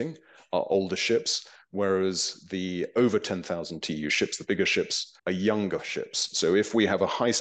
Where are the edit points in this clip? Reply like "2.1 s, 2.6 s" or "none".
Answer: 5.2 s